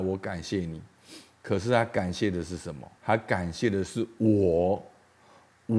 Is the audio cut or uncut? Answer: cut